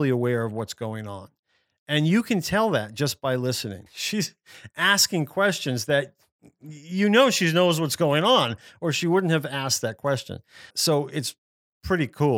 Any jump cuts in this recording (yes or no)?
yes